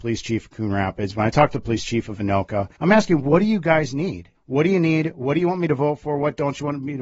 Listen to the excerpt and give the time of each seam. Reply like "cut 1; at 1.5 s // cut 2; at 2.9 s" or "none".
cut 1; at 2.7 s // cut 2; at 4.3 s